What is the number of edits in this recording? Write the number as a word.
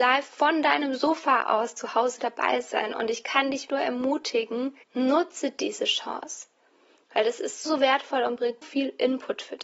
four